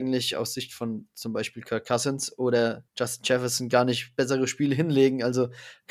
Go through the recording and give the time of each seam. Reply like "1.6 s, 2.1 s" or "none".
2.9 s